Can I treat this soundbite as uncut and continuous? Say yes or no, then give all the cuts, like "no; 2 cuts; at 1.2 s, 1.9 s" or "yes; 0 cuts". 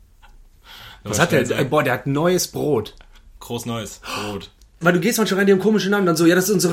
no; 1 cut; at 4.8 s